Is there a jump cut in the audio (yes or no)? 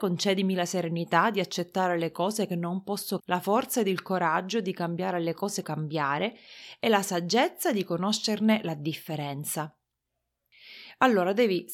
yes